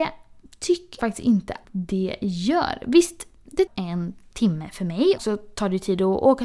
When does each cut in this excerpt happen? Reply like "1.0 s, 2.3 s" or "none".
1.0 s, 1.6 s, 3.7 s, 5.2 s